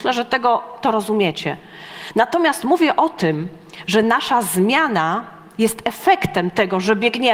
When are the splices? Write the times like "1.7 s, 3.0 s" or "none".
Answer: none